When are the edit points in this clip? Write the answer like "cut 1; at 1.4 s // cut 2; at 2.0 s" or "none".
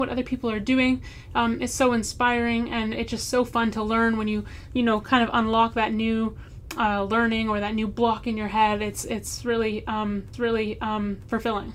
cut 1; at 10.3 s